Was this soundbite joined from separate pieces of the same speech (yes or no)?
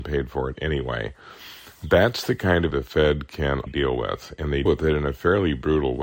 yes